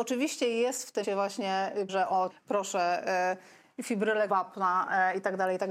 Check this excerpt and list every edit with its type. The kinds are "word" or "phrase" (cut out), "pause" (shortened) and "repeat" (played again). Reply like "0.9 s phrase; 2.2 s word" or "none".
1.0 s word; 1.9 s word; 2.3 s word; 4.3 s word